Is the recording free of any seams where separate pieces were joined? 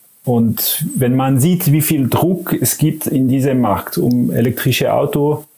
yes; 0 cuts

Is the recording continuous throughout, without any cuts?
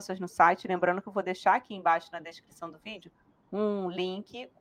yes; 0 cuts

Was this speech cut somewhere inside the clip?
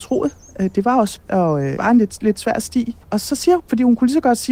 yes; 4 cuts; at 1.2 s, 1.8 s, 3.0 s, 3.6 s

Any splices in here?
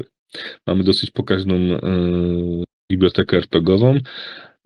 no; 0 cuts

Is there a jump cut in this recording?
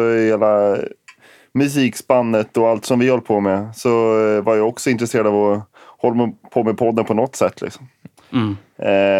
no; 0 cuts

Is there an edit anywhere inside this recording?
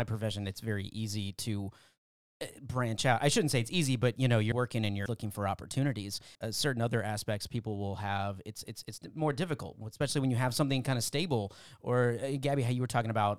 yes; 3 cuts; at 4.5 s, 5.1 s, 6.3 s

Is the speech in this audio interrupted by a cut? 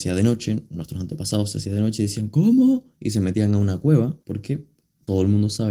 yes; 1 cut; at 4.2 s

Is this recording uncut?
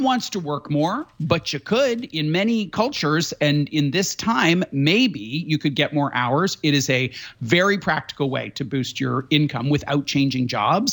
yes; 0 cuts

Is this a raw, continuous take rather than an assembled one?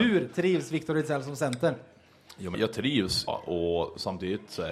no; 2 cuts; at 2.5 s, 3.3 s

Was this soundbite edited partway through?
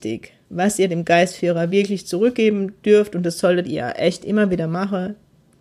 no; 0 cuts

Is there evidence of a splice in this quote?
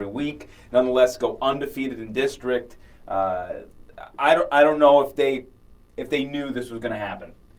no; 0 cuts

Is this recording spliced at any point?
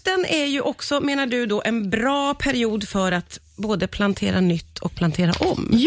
no; 0 cuts

